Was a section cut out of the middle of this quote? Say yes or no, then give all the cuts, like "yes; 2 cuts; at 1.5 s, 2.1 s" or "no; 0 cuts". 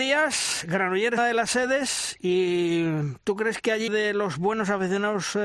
yes; 2 cuts; at 1.2 s, 3.9 s